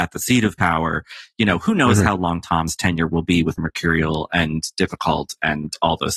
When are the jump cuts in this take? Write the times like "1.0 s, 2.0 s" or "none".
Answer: 3.6 s